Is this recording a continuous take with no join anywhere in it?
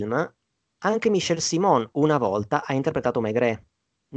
yes; 0 cuts

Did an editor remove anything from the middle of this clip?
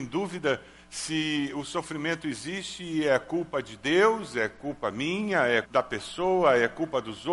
yes; 1 cut; at 5.6 s

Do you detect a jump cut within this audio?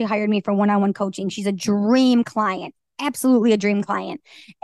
no; 0 cuts

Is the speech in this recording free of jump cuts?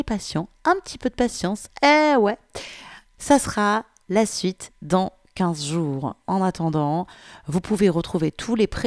yes; 0 cuts

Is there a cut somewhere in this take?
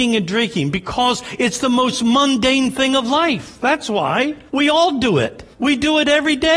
yes; 2 cuts; at 4.5 s, 5.5 s

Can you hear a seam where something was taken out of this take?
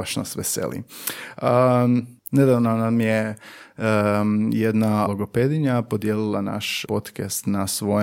yes; 2 cuts; at 5.1 s, 6.8 s

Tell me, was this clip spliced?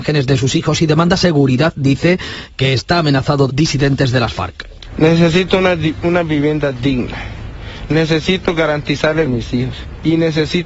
yes; 2 cuts; at 3.5 s, 9.3 s

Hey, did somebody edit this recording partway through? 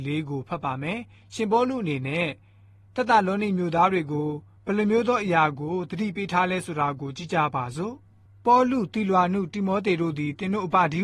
no; 0 cuts

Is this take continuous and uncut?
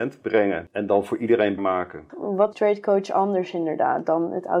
no; 2 cuts; at 1.6 s, 2.5 s

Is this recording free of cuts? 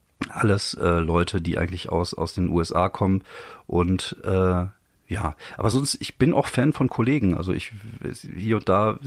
yes; 0 cuts

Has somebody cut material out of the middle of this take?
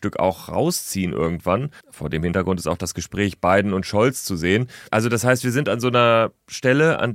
yes; 2 cuts; at 1.8 s, 4.9 s

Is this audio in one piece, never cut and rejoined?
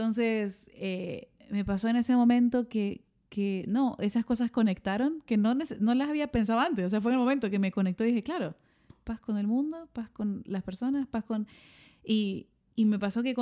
yes; 0 cuts

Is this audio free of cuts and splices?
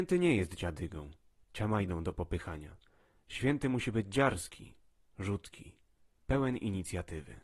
yes; 0 cuts

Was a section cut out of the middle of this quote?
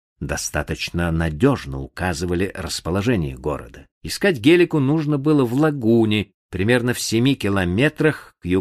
yes; 1 cut; at 3.9 s

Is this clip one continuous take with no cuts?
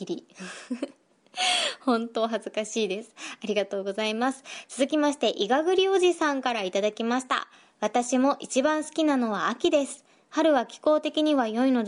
yes; 0 cuts

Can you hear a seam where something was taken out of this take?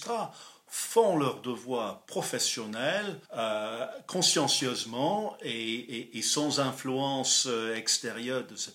yes; 1 cut; at 3.3 s

